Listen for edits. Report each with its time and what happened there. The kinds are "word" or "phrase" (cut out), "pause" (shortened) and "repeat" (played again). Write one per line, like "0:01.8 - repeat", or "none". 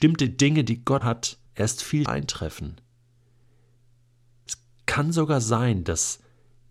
0:01.0 - word
0:01.5 - pause
0:02.1 - word